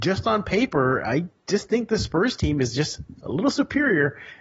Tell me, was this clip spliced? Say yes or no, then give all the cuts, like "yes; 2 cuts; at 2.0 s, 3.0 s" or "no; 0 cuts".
no; 0 cuts